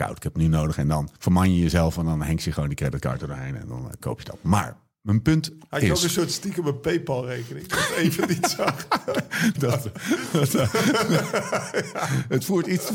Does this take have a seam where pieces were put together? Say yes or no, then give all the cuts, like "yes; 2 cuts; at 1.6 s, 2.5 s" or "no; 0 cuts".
yes; 2 cuts; at 1.2 s, 9.6 s